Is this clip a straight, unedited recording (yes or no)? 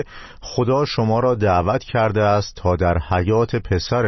yes